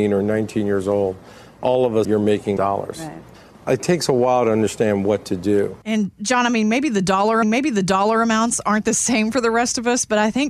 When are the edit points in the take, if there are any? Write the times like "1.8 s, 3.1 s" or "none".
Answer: 2.0 s, 2.6 s, 5.8 s, 7.4 s